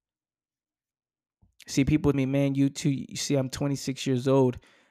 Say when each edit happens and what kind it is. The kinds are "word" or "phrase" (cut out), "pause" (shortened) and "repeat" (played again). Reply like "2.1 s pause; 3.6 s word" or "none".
2.1 s word